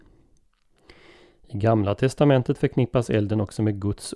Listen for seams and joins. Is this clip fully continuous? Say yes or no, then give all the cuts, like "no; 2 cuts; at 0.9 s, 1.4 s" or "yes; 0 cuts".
yes; 0 cuts